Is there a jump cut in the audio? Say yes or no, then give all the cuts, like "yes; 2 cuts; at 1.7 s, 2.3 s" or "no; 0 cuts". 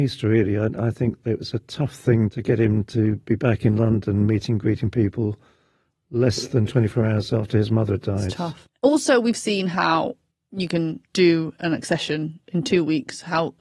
no; 0 cuts